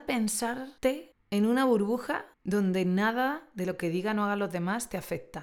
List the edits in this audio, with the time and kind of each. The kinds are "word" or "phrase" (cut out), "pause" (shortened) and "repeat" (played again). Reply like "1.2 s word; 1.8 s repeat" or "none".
2.3 s pause